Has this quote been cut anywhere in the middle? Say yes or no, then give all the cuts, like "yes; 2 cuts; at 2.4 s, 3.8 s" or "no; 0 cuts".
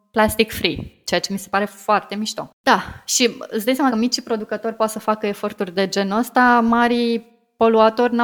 yes; 2 cuts; at 2.5 s, 3.9 s